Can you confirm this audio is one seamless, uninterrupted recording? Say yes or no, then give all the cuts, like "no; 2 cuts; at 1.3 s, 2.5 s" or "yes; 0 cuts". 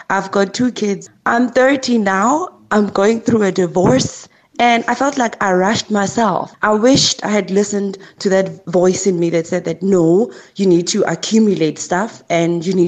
yes; 0 cuts